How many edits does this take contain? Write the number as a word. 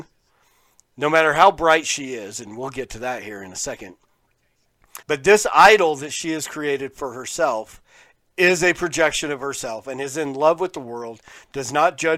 one